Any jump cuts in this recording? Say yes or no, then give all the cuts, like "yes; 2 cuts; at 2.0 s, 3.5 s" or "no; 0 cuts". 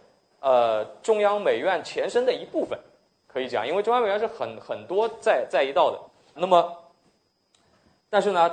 yes; 1 cut; at 6.4 s